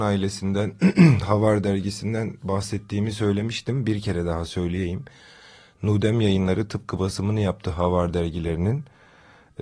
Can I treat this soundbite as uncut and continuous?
yes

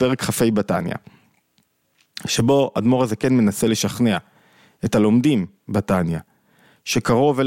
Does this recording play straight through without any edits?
yes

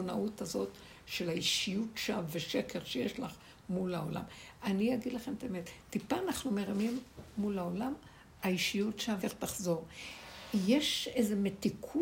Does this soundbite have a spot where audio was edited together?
yes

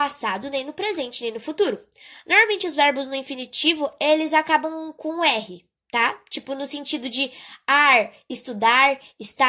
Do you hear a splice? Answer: no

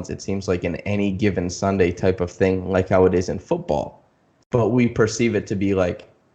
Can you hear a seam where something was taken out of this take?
no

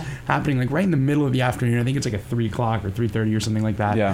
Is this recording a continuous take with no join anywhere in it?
yes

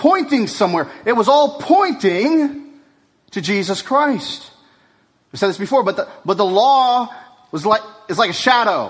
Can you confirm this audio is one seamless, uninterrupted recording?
yes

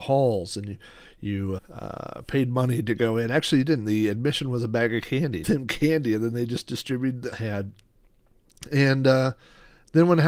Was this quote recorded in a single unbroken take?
no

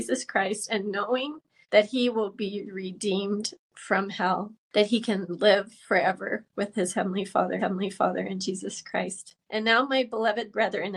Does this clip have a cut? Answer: yes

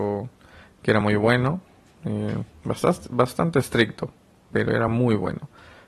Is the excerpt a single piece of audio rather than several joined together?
yes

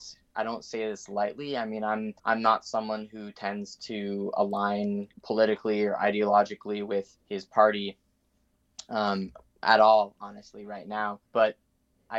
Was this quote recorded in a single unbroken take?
no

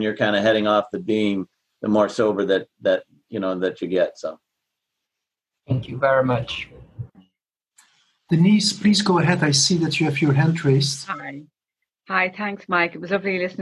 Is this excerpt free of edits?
yes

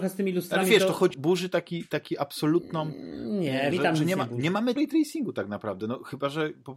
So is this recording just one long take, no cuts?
no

